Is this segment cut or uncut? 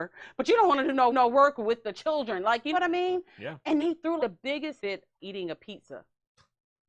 cut